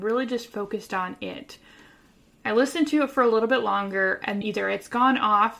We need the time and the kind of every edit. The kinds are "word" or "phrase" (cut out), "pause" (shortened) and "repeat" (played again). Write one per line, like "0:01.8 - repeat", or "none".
0:04.4 - word